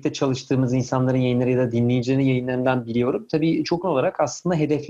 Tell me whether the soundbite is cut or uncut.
cut